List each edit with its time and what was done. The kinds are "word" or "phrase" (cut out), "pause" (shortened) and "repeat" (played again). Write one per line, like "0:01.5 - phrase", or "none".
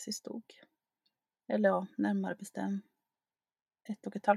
none